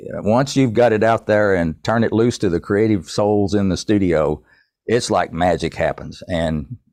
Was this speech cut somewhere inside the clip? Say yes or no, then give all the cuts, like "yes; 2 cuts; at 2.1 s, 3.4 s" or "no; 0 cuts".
no; 0 cuts